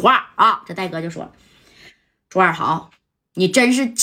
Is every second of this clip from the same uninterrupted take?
yes; 0 cuts

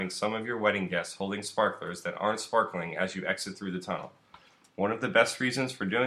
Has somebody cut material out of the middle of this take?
no; 0 cuts

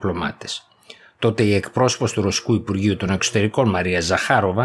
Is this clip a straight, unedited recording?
yes; 0 cuts

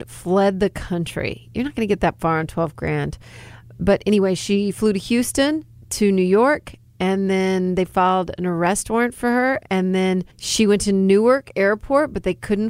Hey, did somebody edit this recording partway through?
yes; 2 cuts; at 5.7 s, 10.3 s

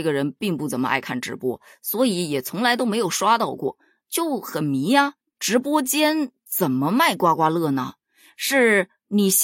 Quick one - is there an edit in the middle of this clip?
no; 0 cuts

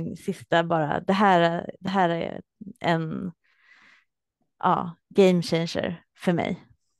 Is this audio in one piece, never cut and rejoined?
yes; 0 cuts

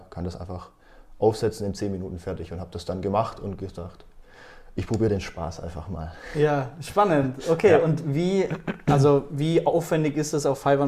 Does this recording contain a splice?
no; 0 cuts

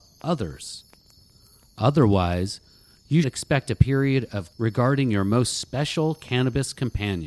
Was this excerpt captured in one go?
no; 2 cuts; at 3.2 s, 4.5 s

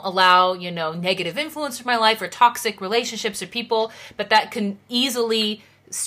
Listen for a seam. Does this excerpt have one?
no; 0 cuts

